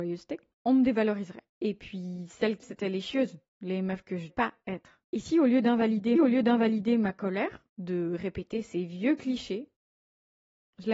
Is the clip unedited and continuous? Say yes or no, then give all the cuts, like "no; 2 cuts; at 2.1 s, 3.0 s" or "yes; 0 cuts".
no; 6 cuts; at 1.5 s, 2.6 s, 4.3 s, 5.0 s, 6.1 s, 7.7 s